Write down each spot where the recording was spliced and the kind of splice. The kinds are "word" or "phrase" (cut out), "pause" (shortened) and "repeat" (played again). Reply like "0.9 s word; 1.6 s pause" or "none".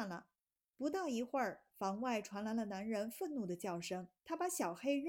4.2 s pause